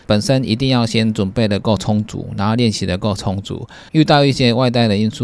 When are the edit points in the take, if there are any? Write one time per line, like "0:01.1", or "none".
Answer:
0:03.9